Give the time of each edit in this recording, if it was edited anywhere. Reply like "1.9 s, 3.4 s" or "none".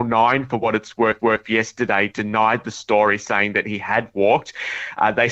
1.2 s